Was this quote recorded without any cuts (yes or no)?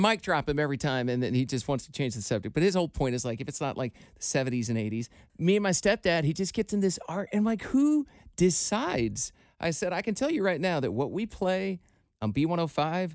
yes